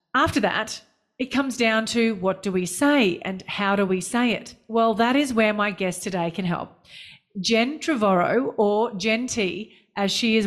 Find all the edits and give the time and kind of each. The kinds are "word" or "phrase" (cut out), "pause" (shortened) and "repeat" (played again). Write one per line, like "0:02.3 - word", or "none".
none